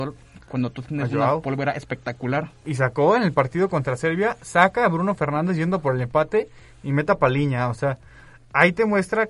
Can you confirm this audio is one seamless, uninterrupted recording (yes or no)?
yes